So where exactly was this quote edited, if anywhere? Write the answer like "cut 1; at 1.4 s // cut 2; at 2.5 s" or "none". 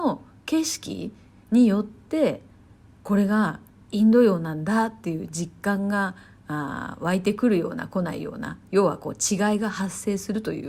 none